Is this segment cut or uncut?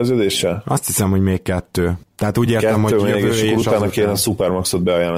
uncut